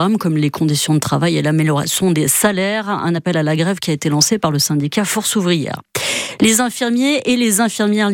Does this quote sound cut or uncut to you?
uncut